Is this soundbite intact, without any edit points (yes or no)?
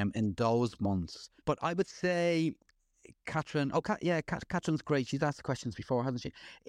no